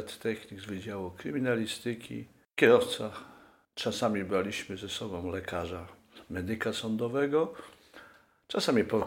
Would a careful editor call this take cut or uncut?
uncut